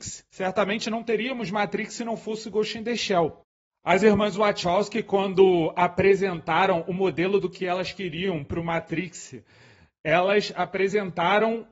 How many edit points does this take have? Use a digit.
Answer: 0